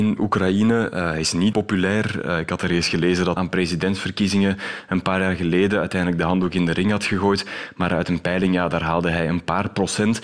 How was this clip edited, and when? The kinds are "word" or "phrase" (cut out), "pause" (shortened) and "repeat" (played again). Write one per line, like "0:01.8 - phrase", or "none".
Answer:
0:01.5 - word
0:03.4 - phrase